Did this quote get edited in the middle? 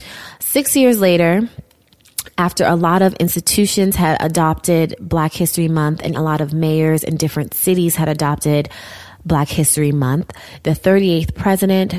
yes; 1 cut; at 6.1 s

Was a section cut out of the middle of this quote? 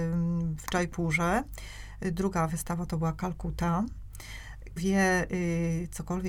yes; 1 cut; at 4.8 s

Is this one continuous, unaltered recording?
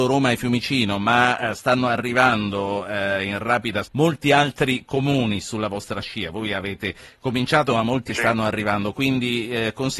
no; 2 cuts; at 3.8 s, 8.1 s

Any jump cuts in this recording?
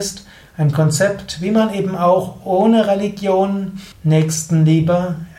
yes; 1 cut; at 3.9 s

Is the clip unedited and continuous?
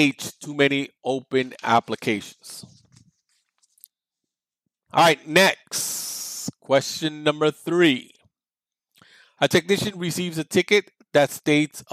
yes; 0 cuts

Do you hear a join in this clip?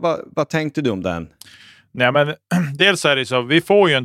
no; 0 cuts

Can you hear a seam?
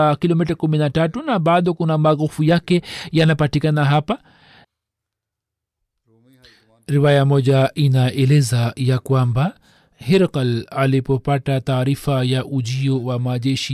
no; 0 cuts

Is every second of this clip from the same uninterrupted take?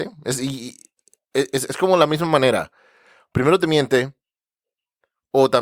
yes; 0 cuts

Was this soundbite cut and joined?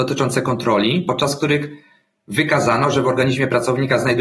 no; 0 cuts

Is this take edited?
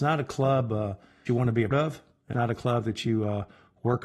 yes; 3 cuts; at 1.3 s, 1.7 s, 2.3 s

